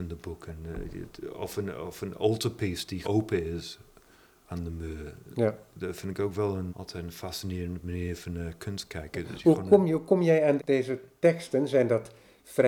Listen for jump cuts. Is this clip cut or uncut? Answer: cut